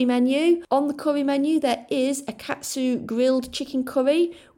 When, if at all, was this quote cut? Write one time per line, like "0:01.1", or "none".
none